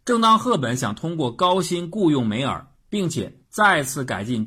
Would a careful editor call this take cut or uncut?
uncut